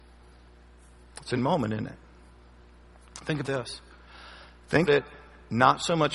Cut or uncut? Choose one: cut